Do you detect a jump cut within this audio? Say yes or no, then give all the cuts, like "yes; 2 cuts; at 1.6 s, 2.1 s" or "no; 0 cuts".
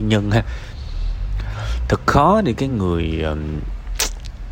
no; 0 cuts